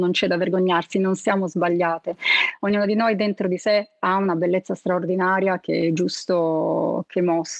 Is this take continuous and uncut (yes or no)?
yes